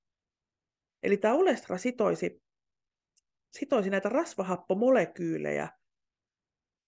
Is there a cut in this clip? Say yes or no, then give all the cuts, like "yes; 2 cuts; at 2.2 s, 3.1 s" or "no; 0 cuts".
no; 0 cuts